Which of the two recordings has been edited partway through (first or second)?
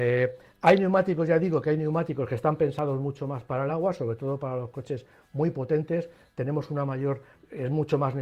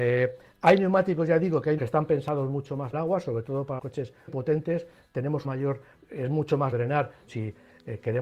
second